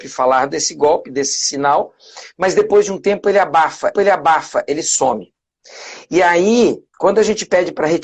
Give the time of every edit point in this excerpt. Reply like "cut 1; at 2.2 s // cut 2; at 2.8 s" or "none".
cut 1; at 3.9 s // cut 2; at 6.9 s